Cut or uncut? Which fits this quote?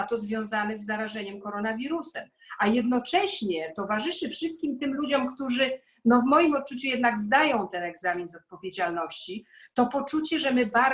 uncut